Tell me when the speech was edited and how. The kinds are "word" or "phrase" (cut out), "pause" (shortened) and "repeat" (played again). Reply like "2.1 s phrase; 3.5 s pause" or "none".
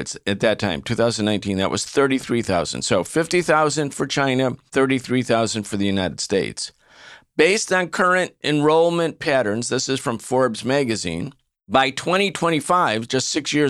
4.7 s pause; 11.6 s pause